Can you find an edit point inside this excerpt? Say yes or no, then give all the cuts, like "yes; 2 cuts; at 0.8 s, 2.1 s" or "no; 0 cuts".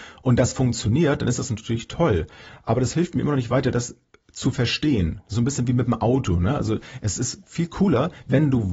no; 0 cuts